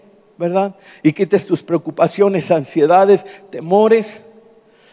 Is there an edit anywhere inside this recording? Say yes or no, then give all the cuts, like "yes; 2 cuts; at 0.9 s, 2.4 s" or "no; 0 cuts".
no; 0 cuts